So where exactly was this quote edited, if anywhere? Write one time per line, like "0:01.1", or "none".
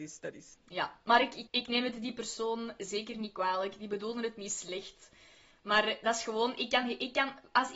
none

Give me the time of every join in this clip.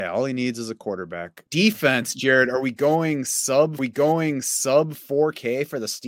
0:01.5
0:03.8

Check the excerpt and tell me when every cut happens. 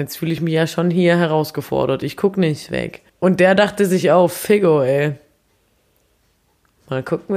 0:03.1

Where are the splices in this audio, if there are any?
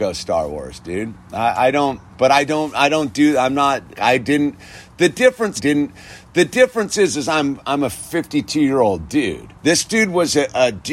0:02.1
0:03.9
0:05.6
0:09.6

